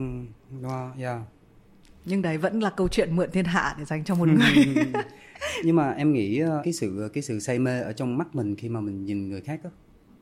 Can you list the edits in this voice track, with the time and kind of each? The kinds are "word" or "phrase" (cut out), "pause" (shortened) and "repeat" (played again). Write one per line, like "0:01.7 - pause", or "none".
none